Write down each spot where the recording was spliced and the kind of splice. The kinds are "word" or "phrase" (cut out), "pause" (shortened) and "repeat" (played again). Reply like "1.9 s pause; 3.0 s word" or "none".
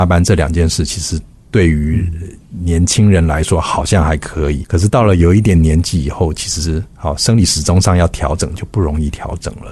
4.6 s word